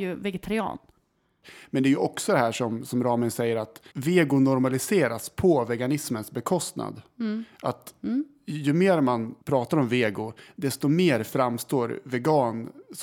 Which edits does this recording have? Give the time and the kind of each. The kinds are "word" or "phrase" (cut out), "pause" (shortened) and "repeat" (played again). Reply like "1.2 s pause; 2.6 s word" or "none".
3.9 s pause; 9.4 s pause